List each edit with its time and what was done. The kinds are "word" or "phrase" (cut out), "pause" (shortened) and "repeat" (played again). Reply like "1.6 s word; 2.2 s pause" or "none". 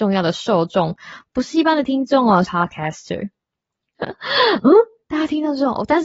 2.4 s word